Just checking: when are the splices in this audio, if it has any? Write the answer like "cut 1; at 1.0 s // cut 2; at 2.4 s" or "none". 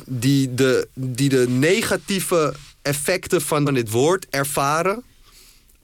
cut 1; at 3.7 s